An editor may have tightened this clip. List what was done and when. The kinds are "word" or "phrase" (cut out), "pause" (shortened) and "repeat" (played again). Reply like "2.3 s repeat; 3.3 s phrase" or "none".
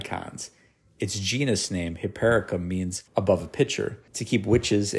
3.1 s pause; 4.1 s pause